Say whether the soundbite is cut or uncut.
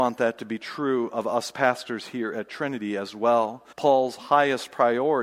cut